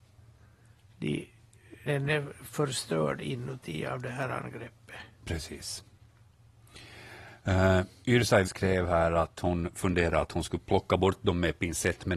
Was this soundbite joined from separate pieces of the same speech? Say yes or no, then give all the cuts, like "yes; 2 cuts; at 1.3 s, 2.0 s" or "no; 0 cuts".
yes; 2 cuts; at 1.9 s, 8.4 s